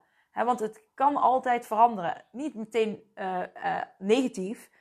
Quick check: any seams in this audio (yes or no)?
no